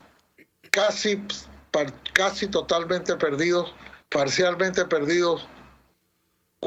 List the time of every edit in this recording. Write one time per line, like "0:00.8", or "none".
0:04.0